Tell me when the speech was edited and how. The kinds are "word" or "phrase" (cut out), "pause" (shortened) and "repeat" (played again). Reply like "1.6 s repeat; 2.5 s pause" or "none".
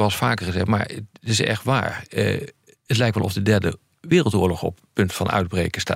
none